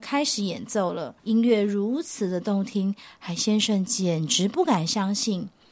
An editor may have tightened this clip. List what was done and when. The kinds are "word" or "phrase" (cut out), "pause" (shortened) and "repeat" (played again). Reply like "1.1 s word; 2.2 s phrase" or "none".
1.2 s pause